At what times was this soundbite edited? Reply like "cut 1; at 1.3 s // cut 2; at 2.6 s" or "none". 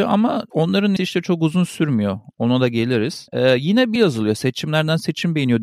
cut 1; at 1.0 s // cut 2; at 4.0 s